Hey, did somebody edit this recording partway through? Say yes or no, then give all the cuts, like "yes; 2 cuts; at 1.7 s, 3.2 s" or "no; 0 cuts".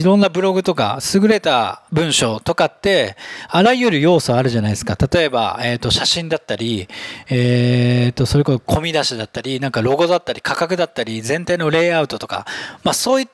yes; 1 cut; at 1.9 s